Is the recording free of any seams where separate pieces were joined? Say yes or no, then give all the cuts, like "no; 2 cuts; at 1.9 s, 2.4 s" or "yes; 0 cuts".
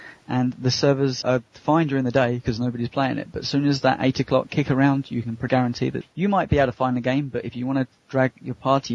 no; 3 cuts; at 1.2 s, 5.5 s, 6.0 s